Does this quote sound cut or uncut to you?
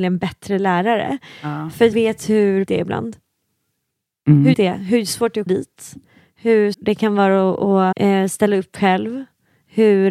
cut